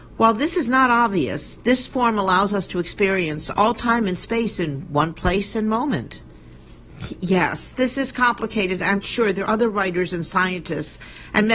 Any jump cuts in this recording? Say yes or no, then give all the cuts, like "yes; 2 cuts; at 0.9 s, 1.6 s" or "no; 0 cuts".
yes; 2 cuts; at 9.0 s, 9.5 s